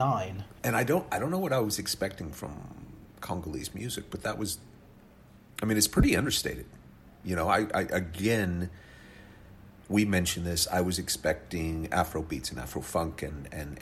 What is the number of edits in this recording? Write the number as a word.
zero